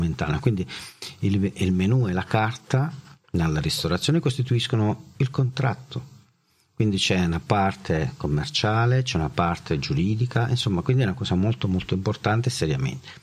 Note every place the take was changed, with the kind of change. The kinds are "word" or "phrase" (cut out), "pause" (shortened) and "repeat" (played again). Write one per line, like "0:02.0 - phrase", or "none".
none